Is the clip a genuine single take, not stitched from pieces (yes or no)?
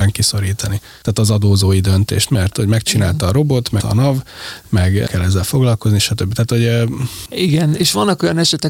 no